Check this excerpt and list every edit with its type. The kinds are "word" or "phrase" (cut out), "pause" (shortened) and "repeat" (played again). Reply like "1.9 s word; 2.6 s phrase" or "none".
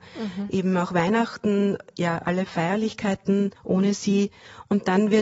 3.6 s pause